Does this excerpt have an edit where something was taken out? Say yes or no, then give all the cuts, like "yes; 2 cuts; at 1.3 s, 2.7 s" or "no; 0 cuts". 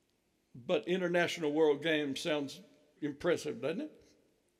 yes; 1 cut; at 3.0 s